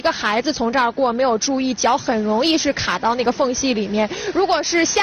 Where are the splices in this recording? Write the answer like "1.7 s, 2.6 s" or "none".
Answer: none